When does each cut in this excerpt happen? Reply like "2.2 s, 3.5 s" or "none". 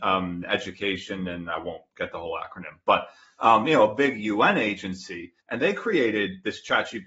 5.4 s